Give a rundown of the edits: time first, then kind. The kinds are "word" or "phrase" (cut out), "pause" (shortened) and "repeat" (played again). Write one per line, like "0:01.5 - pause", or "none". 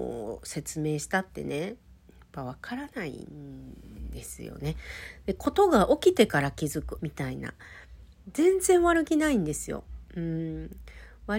0:07.0 - phrase